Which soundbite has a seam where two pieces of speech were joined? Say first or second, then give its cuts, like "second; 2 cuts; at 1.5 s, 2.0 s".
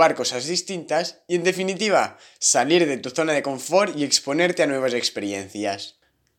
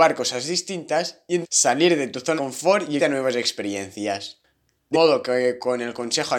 second; 4 cuts; at 1.4 s, 2.4 s, 3.0 s, 4.9 s